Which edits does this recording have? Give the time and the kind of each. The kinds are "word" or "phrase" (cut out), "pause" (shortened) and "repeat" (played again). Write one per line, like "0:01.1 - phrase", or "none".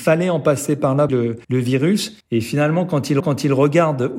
0:01.1 - phrase
0:01.4 - pause
0:02.2 - pause
0:03.2 - repeat